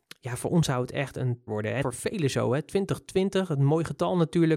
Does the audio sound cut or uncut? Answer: cut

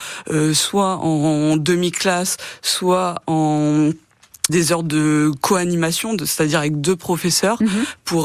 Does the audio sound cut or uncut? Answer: cut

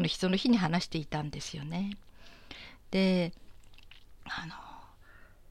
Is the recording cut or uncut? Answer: uncut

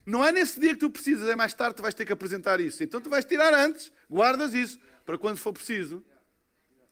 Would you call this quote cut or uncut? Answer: uncut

